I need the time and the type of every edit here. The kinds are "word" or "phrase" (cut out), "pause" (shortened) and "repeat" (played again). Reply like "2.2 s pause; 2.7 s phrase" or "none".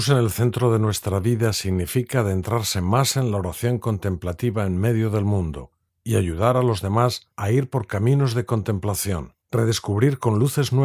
5.9 s pause; 7.3 s pause; 9.4 s pause